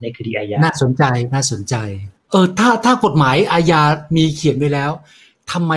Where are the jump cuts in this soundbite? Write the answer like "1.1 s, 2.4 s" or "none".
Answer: 2.2 s